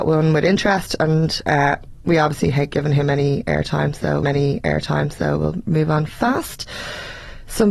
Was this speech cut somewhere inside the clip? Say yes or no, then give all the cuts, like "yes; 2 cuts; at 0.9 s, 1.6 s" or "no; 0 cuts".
yes; 1 cut; at 4.2 s